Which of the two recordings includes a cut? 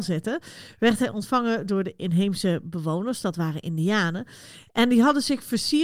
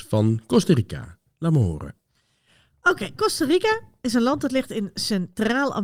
second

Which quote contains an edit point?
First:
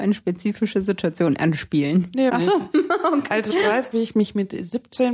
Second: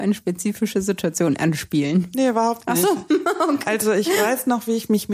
first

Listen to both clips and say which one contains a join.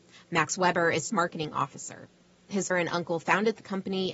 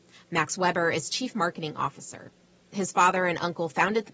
first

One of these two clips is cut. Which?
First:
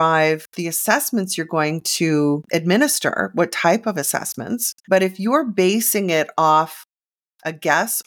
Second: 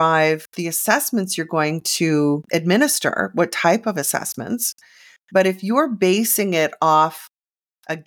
first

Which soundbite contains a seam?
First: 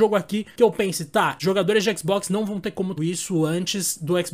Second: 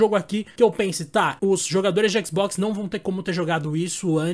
first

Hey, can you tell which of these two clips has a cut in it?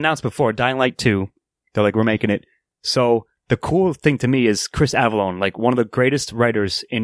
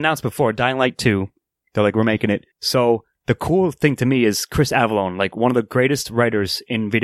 second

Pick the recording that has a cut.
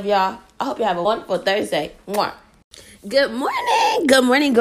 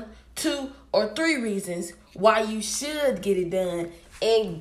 first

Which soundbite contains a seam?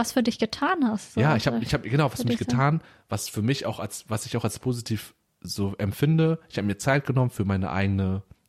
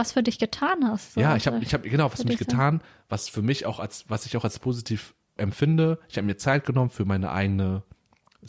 second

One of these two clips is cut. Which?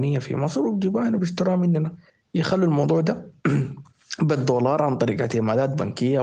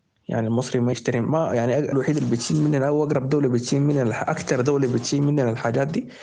second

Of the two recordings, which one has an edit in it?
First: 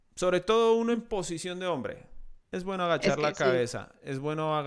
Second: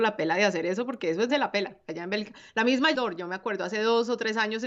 second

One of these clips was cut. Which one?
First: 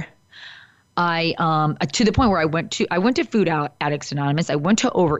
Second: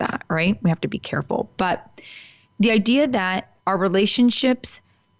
second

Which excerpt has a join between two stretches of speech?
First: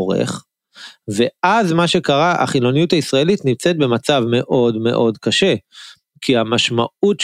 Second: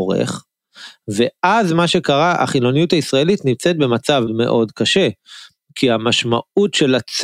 second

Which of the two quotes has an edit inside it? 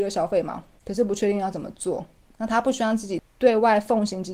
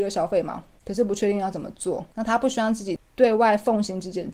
second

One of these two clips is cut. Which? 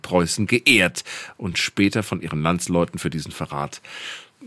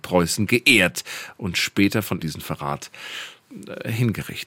second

